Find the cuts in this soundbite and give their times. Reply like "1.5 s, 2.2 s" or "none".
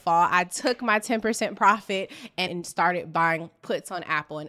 2.5 s